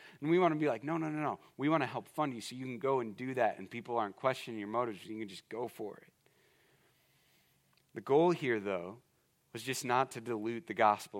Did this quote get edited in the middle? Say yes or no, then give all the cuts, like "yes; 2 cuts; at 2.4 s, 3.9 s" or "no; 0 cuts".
no; 0 cuts